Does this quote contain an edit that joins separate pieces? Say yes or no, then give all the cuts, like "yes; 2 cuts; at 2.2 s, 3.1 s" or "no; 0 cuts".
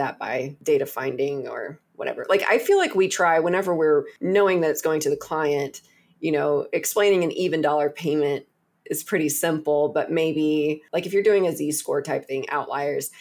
no; 0 cuts